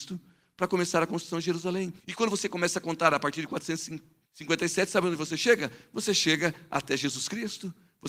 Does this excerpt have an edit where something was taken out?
yes; 2 cuts; at 2.0 s, 4.3 s

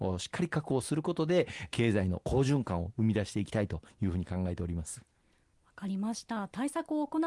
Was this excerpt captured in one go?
yes; 0 cuts

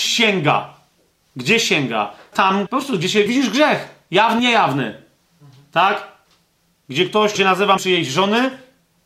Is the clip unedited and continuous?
no; 6 cuts; at 2.3 s, 2.7 s, 3.3 s, 4.4 s, 7.3 s, 7.8 s

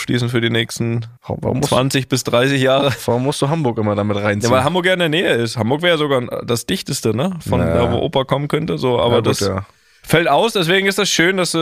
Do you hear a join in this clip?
yes; 1 cut; at 1.2 s

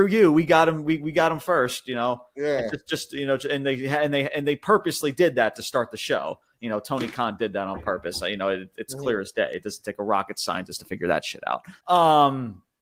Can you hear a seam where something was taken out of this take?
yes; 1 cut; at 11.8 s

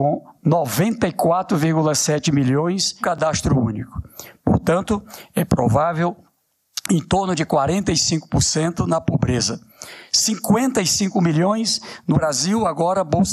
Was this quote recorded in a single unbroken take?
no; 2 cuts; at 3.0 s, 12.1 s

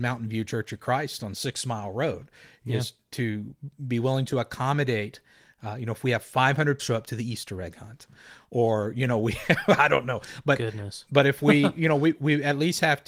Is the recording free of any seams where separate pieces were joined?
no; 1 cut; at 6.8 s

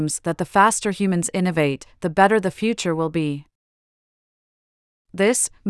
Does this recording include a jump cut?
no; 0 cuts

